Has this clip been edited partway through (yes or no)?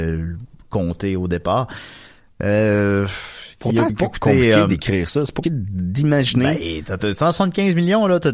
yes